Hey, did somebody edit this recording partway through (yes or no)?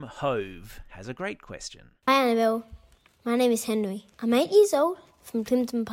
yes